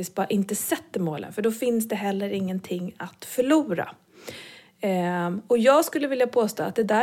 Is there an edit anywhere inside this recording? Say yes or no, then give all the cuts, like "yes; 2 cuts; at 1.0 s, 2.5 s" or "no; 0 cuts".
no; 0 cuts